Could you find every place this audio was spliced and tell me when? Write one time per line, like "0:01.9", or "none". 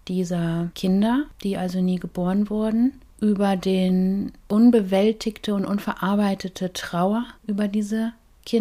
0:07.4